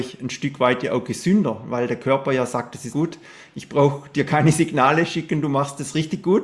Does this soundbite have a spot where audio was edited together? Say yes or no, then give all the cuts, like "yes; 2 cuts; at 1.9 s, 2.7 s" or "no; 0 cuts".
yes; 1 cut; at 2.9 s